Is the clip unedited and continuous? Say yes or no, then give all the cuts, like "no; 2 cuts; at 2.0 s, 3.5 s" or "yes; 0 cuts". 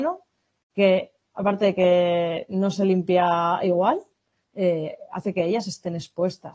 yes; 0 cuts